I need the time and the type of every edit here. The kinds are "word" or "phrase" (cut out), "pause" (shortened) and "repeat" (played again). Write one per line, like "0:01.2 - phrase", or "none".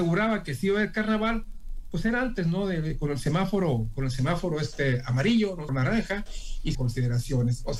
0:05.7 - word
0:06.7 - phrase